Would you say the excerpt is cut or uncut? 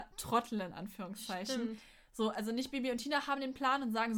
uncut